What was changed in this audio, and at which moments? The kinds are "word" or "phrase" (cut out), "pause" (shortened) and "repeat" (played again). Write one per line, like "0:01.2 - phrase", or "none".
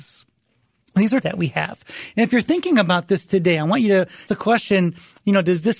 0:01.2 - word
0:04.3 - word

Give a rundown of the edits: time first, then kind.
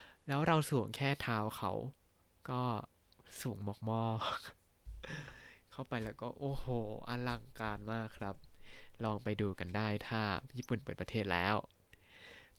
none

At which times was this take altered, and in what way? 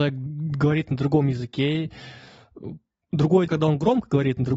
0:03.5 - word

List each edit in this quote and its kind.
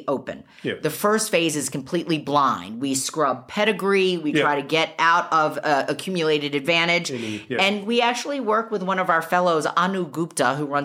none

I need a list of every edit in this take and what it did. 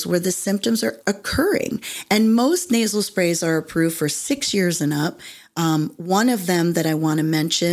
0:01.0 - word

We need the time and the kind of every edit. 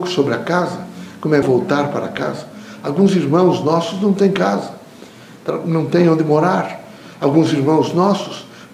0:01.4 - word

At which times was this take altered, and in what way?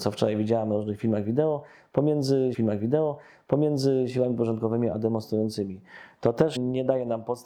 0:02.5 - repeat
0:06.6 - word

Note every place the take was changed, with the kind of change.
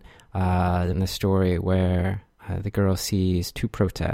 0:00.9 - word

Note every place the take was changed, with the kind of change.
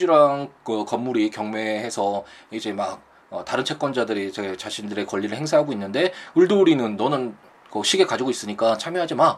none

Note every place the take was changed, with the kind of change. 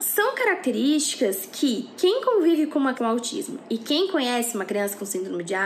0:02.9 - word

